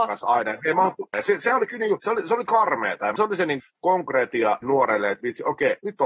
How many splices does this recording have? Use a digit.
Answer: 6